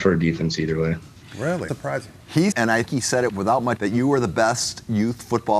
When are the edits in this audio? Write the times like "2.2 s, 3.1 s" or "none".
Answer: 1.7 s, 2.5 s, 2.9 s, 3.3 s, 3.8 s

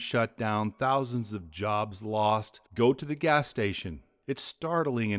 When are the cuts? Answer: 2.7 s

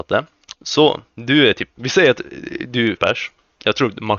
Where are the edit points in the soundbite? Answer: 3.0 s

